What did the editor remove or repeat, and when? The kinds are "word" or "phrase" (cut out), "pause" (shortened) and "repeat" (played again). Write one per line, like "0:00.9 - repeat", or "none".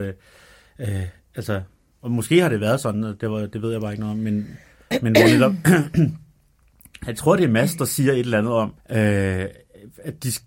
0:01.9 - pause
0:08.8 - pause